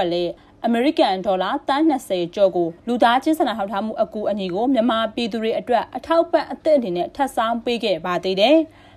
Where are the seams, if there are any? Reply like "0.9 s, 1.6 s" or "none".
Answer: 2.8 s